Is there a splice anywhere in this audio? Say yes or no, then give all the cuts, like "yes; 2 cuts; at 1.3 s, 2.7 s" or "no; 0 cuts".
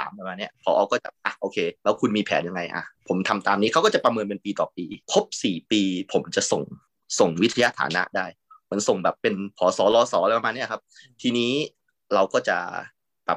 yes; 2 cuts; at 1.8 s, 5.0 s